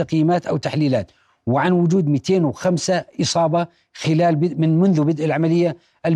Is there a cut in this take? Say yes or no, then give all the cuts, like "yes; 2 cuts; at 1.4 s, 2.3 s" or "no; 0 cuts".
no; 0 cuts